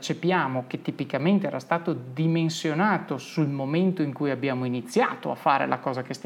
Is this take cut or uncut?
uncut